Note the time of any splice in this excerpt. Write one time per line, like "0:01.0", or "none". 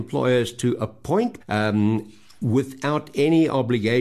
0:01.4